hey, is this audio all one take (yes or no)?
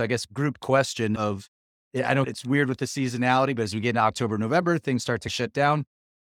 yes